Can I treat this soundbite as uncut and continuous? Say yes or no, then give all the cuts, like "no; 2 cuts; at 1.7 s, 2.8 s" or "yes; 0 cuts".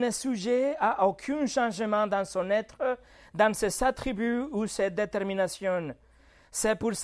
yes; 0 cuts